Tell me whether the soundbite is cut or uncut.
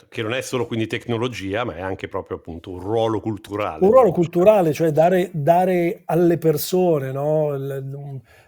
uncut